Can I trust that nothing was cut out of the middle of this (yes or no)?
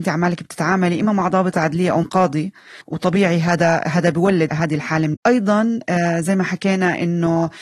no